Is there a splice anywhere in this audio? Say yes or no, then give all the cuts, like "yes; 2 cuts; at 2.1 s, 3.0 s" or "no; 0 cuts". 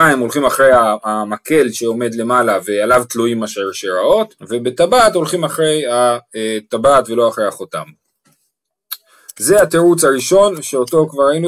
yes; 1 cut; at 4.4 s